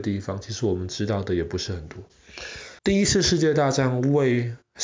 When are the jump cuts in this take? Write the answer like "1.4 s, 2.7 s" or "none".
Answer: 2.8 s

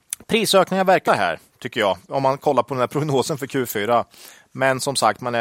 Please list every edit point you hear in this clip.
1.1 s

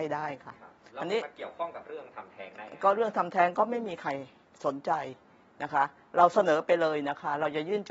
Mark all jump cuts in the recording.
none

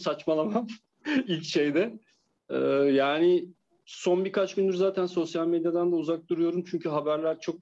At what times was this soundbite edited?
none

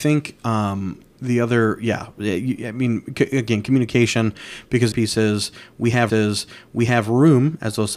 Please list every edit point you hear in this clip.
4.9 s, 6.1 s

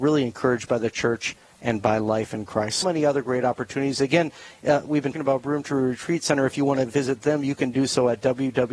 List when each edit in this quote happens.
2.8 s, 5.1 s

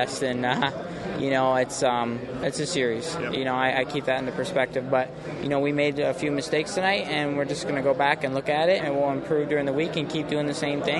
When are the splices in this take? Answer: 8.8 s

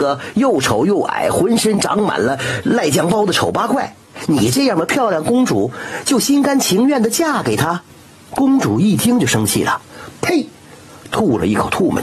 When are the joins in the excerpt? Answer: 7.9 s

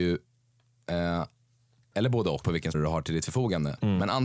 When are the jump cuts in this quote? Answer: 1.9 s, 2.4 s, 2.7 s

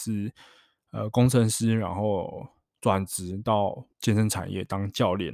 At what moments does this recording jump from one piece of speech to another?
3.9 s

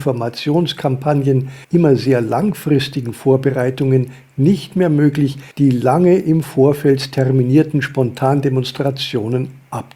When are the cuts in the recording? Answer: 1.6 s, 5.5 s

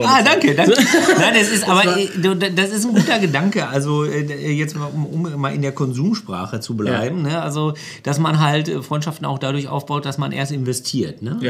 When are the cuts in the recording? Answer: none

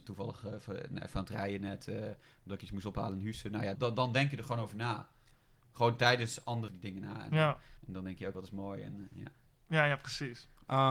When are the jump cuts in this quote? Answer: 3.7 s, 6.7 s, 7.8 s, 8.3 s

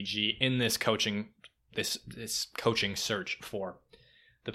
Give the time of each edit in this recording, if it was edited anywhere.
none

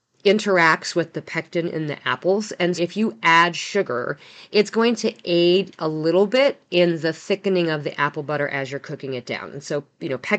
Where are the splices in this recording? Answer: 2.8 s

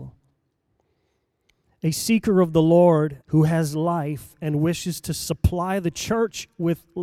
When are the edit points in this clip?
3.2 s

